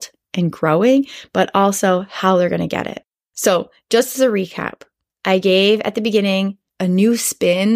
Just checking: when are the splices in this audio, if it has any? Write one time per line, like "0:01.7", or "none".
none